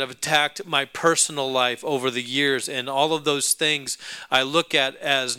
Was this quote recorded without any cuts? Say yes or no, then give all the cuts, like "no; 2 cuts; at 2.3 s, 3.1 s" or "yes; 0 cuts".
yes; 0 cuts